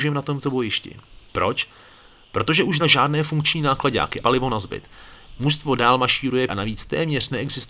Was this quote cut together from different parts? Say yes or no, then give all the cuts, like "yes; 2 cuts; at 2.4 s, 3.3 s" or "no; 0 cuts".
yes; 4 cuts; at 1.3 s, 2.8 s, 4.2 s, 6.5 s